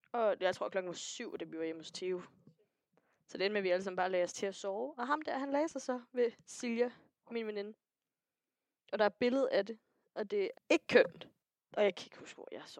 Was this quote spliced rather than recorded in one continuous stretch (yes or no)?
yes